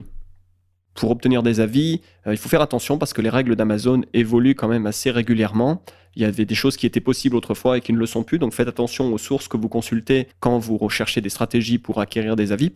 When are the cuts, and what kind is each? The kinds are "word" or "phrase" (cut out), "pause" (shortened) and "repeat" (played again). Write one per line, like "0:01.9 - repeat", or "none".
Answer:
0:10.3 - pause

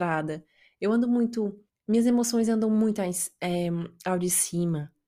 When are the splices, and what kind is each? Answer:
0:01.7 - pause

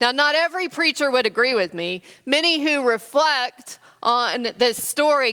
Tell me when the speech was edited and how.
none

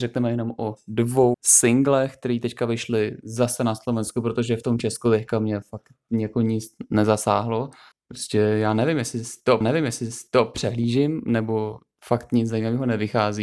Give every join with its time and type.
0:01.3 - word
0:07.9 - pause
0:09.6 - repeat

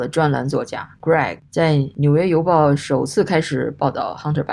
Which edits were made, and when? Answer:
0:01.4 - word

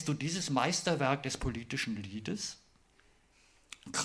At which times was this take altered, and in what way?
none

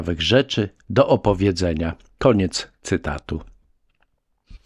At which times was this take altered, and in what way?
none

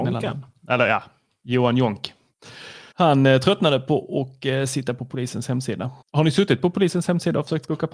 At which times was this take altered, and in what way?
0:02.9 - pause
0:06.0 - pause

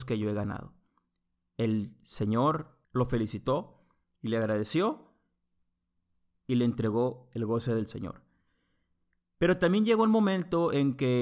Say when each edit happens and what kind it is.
0:02.8 - pause

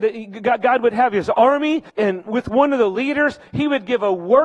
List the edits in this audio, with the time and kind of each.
0:01.9 - pause

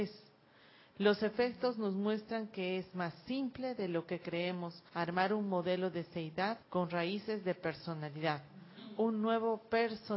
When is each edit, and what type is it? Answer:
0:04.9 - pause
0:06.6 - pause

